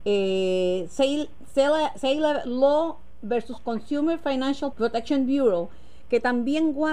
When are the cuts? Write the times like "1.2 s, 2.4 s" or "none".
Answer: 4.7 s